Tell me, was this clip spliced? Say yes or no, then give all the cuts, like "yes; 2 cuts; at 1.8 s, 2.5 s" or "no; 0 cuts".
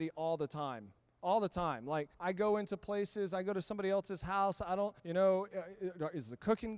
yes; 3 cuts; at 1.0 s, 2.1 s, 5.0 s